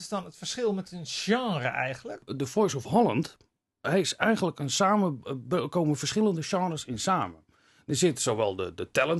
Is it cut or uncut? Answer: uncut